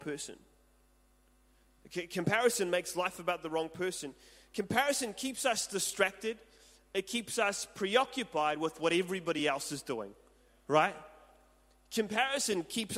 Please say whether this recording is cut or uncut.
uncut